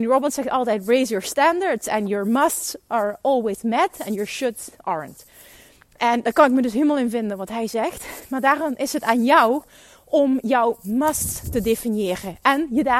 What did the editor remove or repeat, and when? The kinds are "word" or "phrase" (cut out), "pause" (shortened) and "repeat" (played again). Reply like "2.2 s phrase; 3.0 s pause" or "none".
none